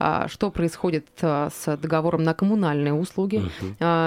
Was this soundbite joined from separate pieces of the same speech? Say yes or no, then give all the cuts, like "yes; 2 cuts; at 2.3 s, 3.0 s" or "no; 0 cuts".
no; 0 cuts